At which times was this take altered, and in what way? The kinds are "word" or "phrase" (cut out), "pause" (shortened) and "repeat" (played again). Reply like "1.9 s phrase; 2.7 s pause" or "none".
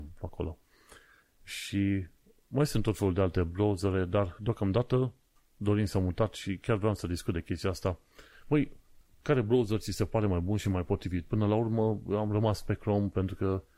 none